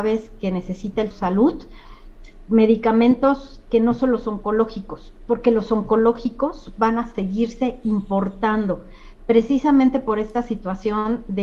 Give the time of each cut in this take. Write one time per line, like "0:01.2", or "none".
0:01.1